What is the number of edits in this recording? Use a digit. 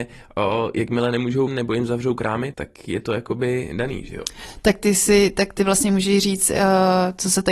2